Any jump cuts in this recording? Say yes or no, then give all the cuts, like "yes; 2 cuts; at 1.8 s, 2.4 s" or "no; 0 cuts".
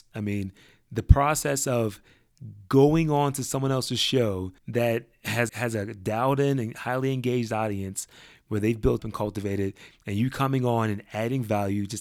yes; 3 cuts; at 4.6 s, 5.5 s, 9.0 s